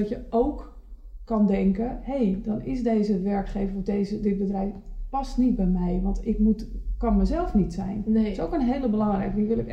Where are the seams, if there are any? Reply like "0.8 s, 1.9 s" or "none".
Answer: none